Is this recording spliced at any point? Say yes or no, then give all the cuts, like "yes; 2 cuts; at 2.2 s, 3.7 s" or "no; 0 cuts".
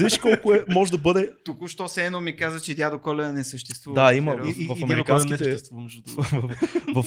no; 0 cuts